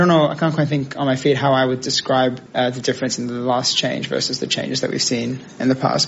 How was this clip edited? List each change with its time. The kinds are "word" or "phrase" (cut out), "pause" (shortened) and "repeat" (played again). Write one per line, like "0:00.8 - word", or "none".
0:02.5 - pause